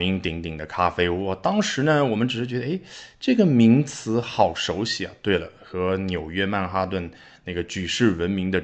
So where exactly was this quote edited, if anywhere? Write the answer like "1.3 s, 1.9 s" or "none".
none